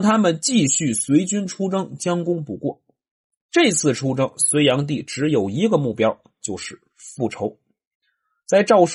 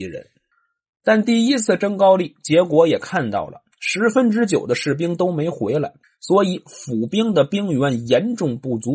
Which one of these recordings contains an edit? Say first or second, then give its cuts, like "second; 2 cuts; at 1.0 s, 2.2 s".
second; 1 cut; at 6.0 s